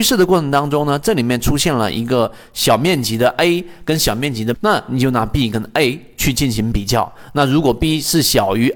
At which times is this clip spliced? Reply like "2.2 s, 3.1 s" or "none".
4.5 s